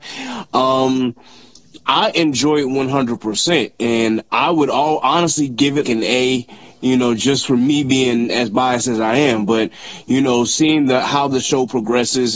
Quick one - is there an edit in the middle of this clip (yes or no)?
yes